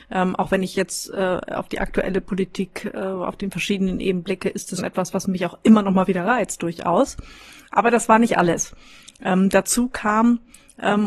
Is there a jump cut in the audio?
yes; 1 cut; at 4.8 s

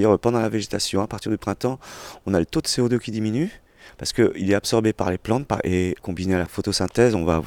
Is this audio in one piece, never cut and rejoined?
yes; 0 cuts

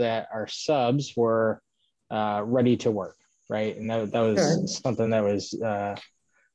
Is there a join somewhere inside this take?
no; 0 cuts

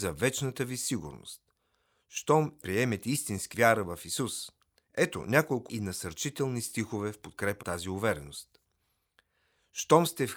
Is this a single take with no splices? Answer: no; 5 cuts; at 2.6 s, 3.5 s, 4.8 s, 5.7 s, 7.6 s

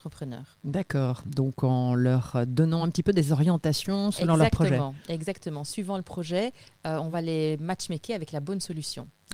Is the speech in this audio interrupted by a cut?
no; 0 cuts

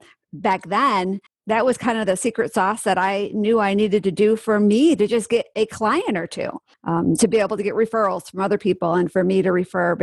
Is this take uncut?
no; 2 cuts; at 1.3 s, 6.7 s

